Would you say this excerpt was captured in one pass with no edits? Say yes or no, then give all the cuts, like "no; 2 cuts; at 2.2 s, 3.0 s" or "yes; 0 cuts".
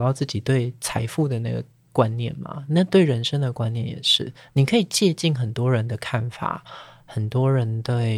yes; 0 cuts